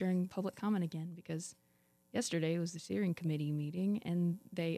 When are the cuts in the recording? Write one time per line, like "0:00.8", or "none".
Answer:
none